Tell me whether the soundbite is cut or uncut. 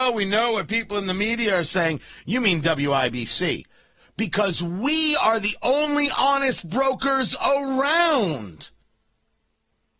uncut